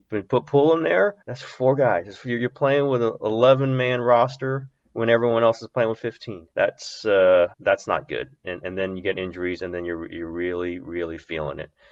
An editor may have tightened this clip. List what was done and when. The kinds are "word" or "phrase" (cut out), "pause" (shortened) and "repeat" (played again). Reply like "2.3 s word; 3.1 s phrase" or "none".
1.2 s pause; 6.5 s pause; 7.5 s pause